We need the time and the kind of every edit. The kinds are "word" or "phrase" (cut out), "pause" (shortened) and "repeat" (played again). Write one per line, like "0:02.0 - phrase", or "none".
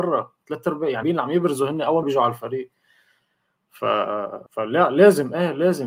0:01.0 - word
0:02.0 - word
0:04.5 - pause